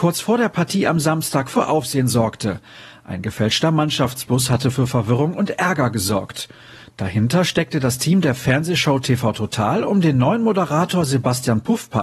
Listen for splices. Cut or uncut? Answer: uncut